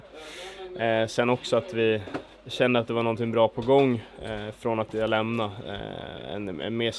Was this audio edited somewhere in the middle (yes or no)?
no